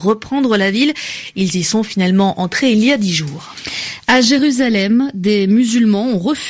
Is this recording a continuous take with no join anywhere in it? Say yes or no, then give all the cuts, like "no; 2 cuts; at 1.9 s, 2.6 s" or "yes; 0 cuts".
yes; 0 cuts